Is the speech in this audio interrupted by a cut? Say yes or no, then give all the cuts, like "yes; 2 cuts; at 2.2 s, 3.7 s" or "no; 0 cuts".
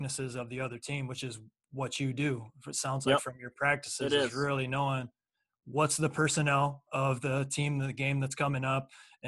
no; 0 cuts